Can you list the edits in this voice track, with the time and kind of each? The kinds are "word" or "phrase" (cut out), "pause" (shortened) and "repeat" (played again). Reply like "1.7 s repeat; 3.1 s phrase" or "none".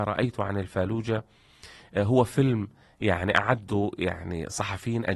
none